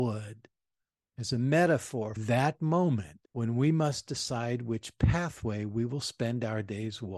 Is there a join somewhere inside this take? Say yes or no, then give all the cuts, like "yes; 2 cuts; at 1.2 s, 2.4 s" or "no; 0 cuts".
yes; 2 cuts; at 2.2 s, 3.2 s